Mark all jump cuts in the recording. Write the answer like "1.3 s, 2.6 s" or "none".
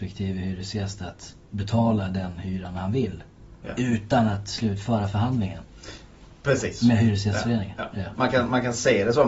1.4 s